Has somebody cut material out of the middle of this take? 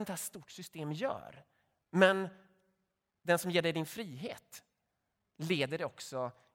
no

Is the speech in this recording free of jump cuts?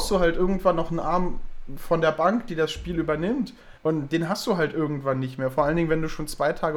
no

